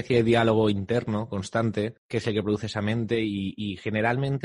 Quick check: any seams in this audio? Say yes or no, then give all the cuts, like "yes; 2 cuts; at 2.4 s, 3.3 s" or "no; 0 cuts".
yes; 1 cut; at 2.0 s